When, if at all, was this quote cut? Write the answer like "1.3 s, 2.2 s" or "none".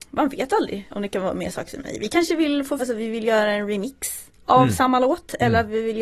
2.8 s